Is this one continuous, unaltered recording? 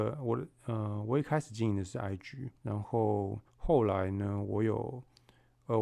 no; 2 cuts; at 2.6 s, 3.5 s

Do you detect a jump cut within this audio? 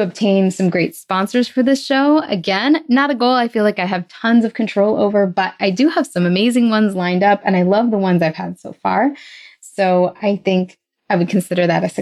no; 0 cuts

